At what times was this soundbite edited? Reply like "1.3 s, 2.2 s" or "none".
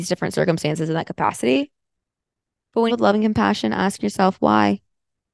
2.9 s